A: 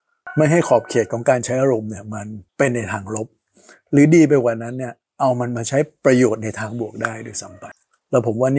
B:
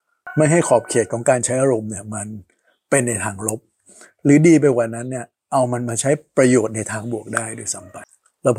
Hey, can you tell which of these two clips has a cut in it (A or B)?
A